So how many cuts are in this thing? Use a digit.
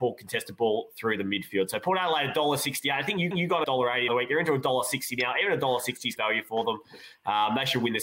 4